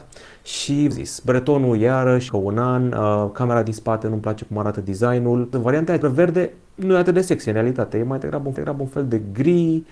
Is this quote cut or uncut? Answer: cut